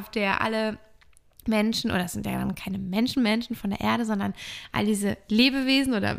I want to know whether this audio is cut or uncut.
uncut